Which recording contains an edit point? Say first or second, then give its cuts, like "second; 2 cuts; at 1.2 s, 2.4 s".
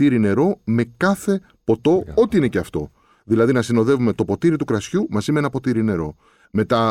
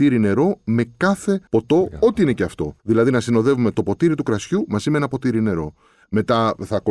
second; 2 cuts; at 1.5 s, 2.8 s